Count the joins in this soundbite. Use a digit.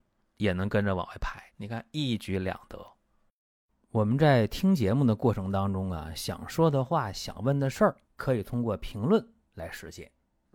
2